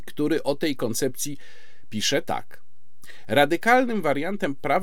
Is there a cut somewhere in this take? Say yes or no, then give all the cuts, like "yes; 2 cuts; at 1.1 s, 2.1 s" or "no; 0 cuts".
no; 0 cuts